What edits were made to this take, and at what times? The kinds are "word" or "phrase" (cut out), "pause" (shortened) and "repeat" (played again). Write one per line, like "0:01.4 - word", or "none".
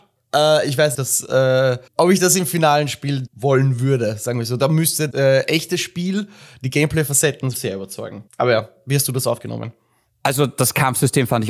0:00.9 - phrase
0:01.9 - pause
0:03.3 - word
0:05.1 - word
0:07.5 - word
0:08.3 - pause